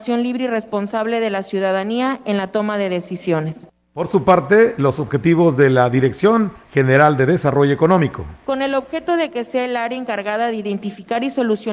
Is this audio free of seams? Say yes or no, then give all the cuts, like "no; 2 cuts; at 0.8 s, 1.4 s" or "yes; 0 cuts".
yes; 0 cuts